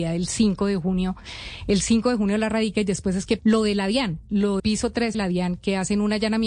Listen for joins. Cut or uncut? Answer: cut